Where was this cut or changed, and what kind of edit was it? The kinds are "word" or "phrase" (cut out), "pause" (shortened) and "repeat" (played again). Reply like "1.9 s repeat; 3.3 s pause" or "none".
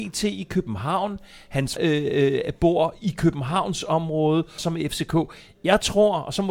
1.8 s word; 4.6 s phrase